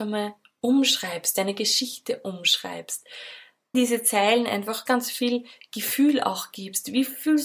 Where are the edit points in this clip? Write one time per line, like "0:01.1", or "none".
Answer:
0:03.7
0:04.9